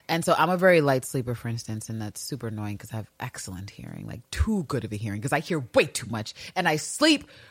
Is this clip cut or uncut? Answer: uncut